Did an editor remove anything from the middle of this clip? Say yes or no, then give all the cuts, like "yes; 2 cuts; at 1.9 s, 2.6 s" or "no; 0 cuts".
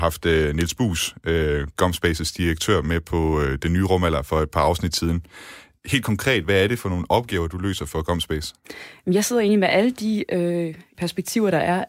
yes; 1 cut; at 10.9 s